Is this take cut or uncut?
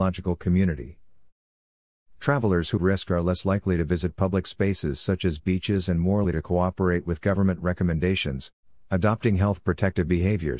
cut